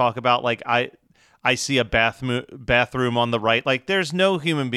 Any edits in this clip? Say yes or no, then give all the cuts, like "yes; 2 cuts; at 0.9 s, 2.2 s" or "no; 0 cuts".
no; 0 cuts